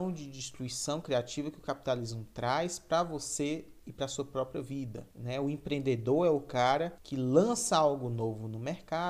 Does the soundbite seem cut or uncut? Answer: uncut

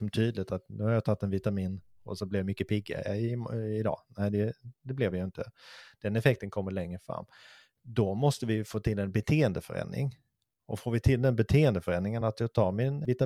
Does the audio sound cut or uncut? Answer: uncut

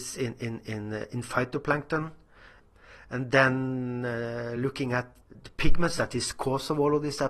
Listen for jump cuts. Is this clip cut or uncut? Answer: uncut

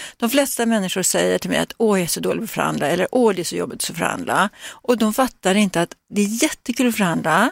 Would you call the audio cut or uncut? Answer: uncut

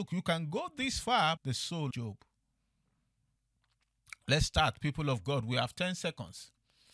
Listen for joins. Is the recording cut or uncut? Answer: cut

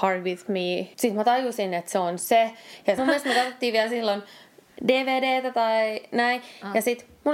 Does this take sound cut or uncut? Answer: cut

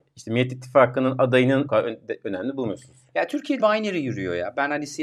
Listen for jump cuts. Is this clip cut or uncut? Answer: cut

